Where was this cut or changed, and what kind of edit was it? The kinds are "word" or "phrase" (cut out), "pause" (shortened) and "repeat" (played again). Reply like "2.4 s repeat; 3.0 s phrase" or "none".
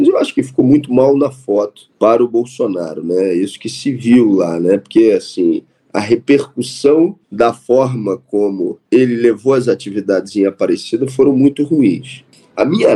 1.9 s pause; 7.2 s pause; 8.9 s pause